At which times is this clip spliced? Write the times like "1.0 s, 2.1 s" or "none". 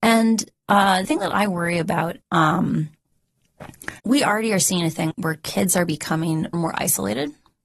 1.0 s, 2.2 s, 4.0 s, 5.1 s, 6.5 s

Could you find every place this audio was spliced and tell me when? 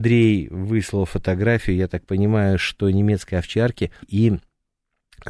4.0 s

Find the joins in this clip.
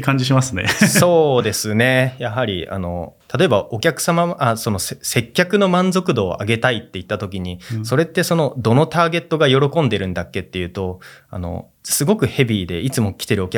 11.8 s

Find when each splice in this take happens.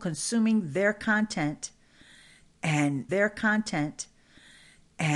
3.1 s

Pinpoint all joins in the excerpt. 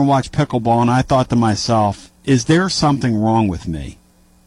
none

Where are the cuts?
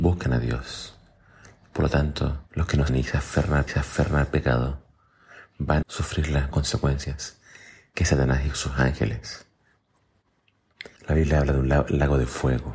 2.5 s, 2.9 s, 3.7 s, 5.8 s, 6.5 s, 11.0 s

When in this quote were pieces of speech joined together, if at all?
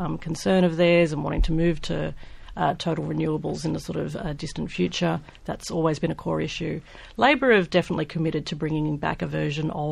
none

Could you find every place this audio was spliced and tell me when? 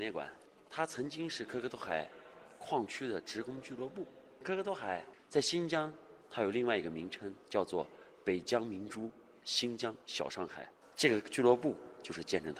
7.4 s

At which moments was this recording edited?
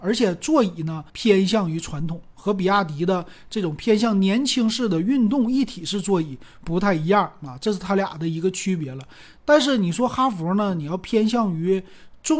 1.1 s

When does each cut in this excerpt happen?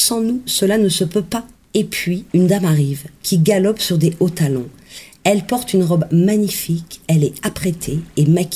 1.5 s, 2.3 s

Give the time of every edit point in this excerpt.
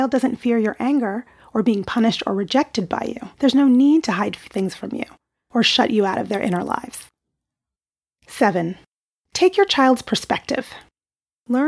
3.3 s

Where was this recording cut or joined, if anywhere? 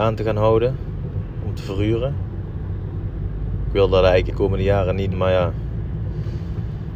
4.3 s, 5.1 s

